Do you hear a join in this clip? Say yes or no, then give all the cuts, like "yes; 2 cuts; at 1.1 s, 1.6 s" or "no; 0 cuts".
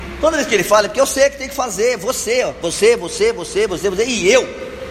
yes; 1 cut; at 3.7 s